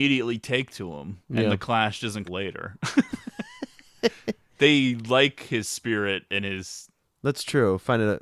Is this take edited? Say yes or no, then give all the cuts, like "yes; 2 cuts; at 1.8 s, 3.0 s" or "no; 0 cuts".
yes; 2 cuts; at 1.2 s, 2.3 s